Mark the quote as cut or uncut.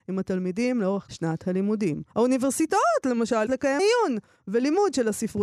cut